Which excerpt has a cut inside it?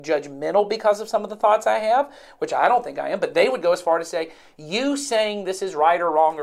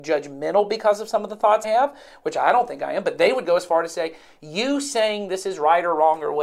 second; 1 cut; at 1.6 s

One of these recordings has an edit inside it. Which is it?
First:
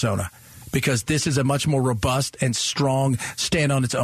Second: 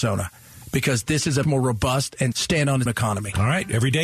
second; 3 cuts; at 1.4 s, 2.3 s, 2.9 s

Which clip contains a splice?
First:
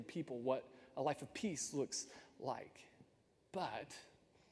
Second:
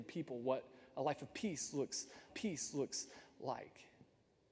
second; 1 cut; at 2.3 s

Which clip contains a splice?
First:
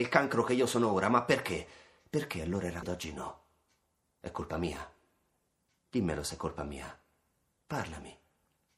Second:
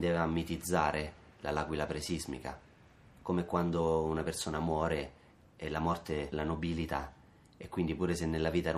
first; 1 cut; at 2.8 s

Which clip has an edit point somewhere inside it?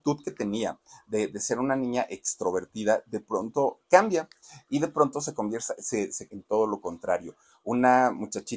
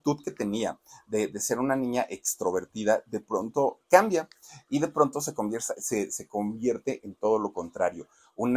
first; 1 cut; at 6.3 s

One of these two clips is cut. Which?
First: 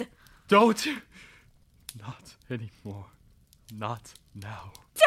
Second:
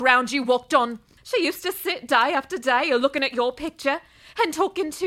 second; 1 cut; at 1.2 s

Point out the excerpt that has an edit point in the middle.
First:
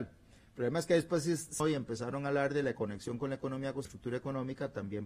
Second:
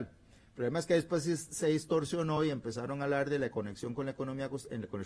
first; 2 cuts; at 1.6 s, 3.8 s

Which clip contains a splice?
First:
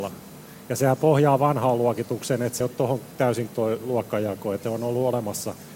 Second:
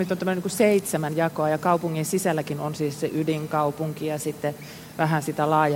first; 3 cuts; at 2.6 s, 3.5 s, 4.6 s

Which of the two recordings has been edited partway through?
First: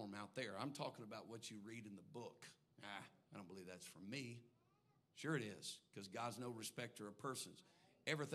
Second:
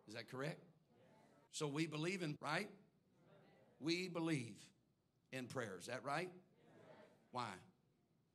second; 2 cuts; at 1.5 s, 2.4 s

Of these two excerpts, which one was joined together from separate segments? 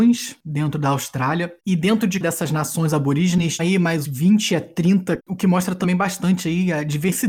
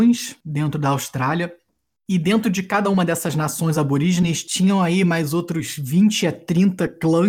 first; 5 cuts; at 1.6 s, 2.2 s, 3.6 s, 4.0 s, 5.2 s

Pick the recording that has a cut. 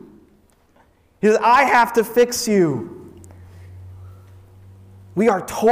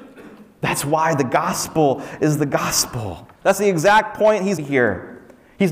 second; 2 cuts; at 3.4 s, 4.6 s

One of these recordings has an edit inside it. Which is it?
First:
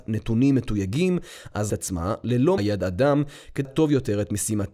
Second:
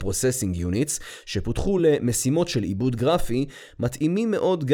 first; 3 cuts; at 1.7 s, 2.6 s, 3.6 s

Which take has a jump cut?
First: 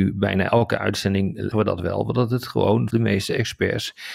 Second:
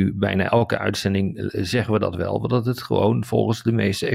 first; 2 cuts; at 1.5 s, 2.9 s

